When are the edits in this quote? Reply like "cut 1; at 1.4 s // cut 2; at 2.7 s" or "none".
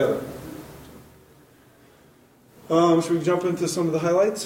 none